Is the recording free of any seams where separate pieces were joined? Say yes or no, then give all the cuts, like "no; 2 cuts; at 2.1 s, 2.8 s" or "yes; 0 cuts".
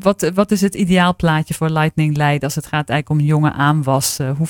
yes; 0 cuts